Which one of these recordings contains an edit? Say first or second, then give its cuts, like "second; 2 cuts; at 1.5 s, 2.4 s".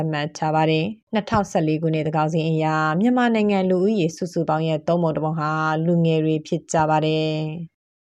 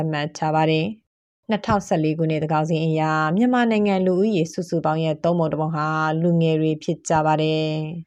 first; 1 cut; at 1.0 s